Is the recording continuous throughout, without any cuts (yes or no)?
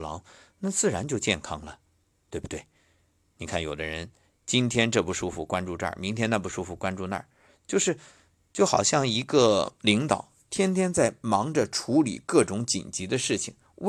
yes